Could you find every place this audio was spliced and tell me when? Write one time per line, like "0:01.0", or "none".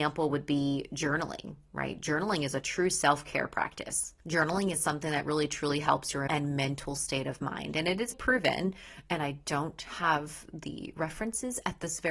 0:06.3
0:08.1